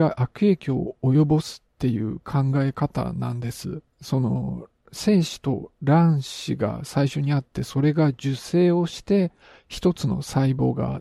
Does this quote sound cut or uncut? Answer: cut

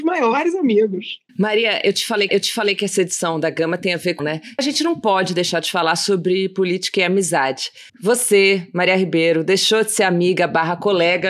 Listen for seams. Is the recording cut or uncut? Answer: cut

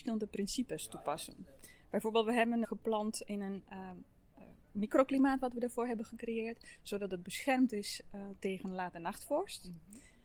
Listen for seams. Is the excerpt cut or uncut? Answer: cut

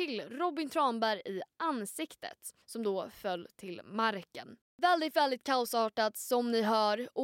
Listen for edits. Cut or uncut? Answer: cut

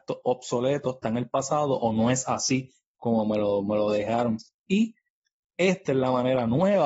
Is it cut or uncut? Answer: uncut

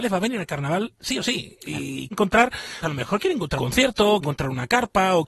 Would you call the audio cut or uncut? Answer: cut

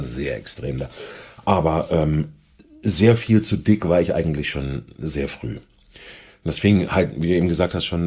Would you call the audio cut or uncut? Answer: uncut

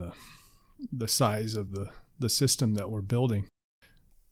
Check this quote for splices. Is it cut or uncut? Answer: uncut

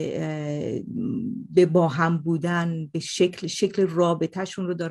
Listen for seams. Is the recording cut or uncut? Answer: uncut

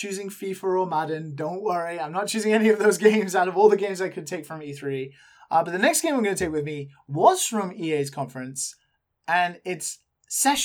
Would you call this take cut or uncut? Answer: uncut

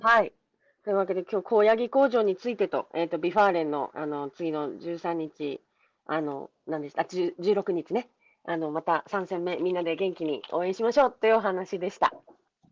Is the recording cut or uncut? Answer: uncut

